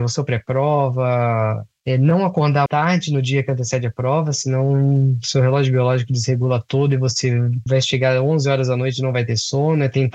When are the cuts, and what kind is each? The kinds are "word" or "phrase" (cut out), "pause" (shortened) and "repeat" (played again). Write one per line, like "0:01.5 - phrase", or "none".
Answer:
0:02.7 - word
0:07.7 - word